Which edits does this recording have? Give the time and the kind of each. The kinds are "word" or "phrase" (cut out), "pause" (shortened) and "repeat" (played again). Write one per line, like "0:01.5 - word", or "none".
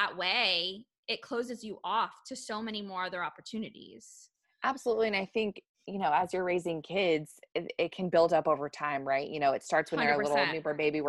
0:04.4 - pause